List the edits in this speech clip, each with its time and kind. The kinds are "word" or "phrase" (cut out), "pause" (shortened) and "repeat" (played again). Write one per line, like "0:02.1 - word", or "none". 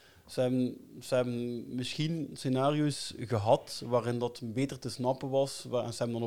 none